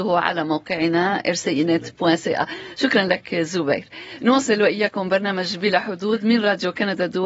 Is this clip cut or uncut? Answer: uncut